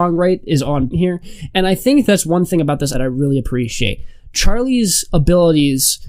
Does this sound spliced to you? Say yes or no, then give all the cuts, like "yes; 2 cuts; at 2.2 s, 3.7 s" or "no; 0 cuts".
yes; 2 cuts; at 0.9 s, 2.9 s